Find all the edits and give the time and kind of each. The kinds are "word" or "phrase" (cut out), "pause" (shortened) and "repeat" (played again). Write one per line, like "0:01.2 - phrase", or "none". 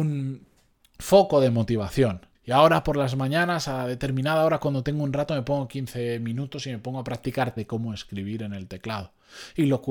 0:02.3 - pause
0:07.6 - word